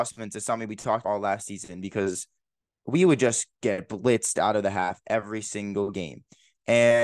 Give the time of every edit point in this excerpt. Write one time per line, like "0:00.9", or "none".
0:01.0

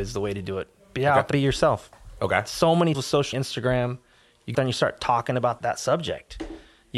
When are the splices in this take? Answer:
0:01.3
0:02.9
0:03.3
0:04.5
0:05.6

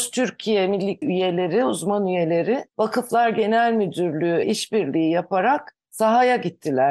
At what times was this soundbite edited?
0:01.0
0:02.7
0:04.4
0:05.8

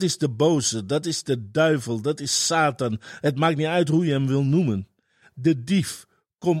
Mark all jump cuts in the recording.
none

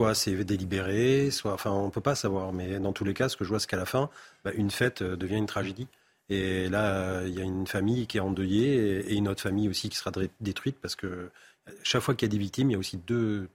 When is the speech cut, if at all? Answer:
none

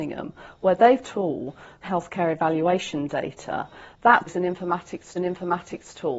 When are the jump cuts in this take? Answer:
0:01.0
0:01.8
0:04.3
0:05.1

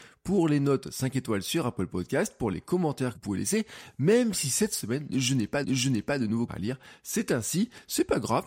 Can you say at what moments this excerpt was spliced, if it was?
0:03.1
0:05.6
0:06.5

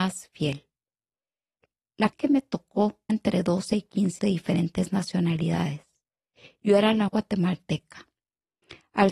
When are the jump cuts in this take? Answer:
0:02.1
0:03.1
0:04.2
0:07.1

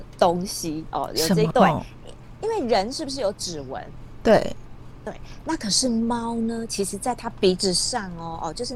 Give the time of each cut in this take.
0:01.5

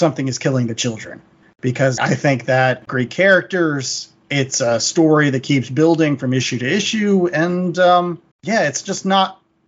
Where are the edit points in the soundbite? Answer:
0:02.0
0:02.9
0:08.3

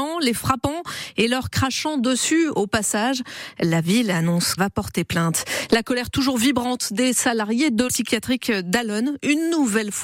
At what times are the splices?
0:04.6
0:07.9

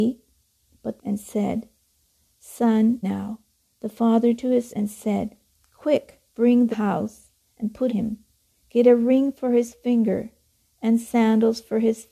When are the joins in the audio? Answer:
0:01.0
0:03.0
0:03.6
0:04.4
0:04.7
0:06.3
0:06.7
0:07.9

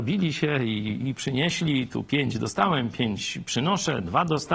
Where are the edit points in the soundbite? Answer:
none

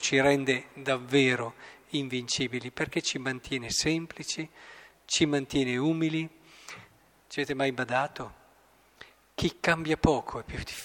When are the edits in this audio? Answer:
none

